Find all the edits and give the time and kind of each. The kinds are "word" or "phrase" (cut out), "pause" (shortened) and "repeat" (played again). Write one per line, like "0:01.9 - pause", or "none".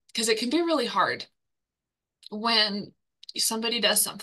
none